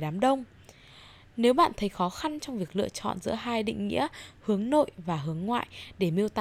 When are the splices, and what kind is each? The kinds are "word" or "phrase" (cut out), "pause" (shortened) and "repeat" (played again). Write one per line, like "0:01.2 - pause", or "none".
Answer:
none